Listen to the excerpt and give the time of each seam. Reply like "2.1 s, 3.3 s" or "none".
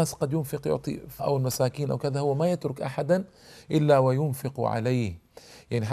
1.2 s